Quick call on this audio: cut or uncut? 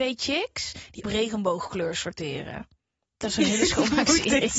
cut